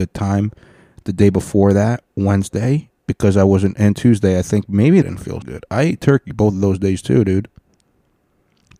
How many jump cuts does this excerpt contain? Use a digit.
3